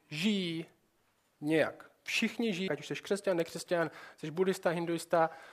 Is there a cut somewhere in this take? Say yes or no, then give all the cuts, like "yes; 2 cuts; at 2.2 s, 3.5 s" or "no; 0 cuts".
yes; 1 cut; at 2.7 s